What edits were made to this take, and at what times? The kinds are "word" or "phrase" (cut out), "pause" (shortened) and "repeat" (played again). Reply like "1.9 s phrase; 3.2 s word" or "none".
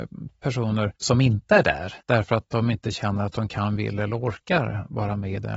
1.0 s pause; 2.0 s pause